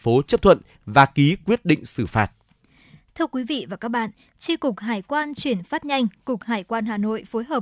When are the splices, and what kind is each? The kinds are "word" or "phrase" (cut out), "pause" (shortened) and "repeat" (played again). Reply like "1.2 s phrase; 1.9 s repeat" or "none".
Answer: none